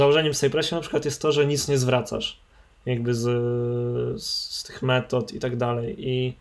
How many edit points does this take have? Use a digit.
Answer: 0